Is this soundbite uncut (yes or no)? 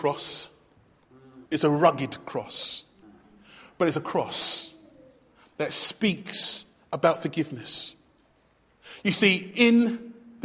no